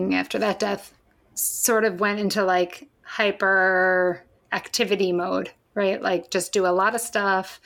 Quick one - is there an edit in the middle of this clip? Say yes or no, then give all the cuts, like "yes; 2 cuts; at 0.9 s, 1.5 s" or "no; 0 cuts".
no; 0 cuts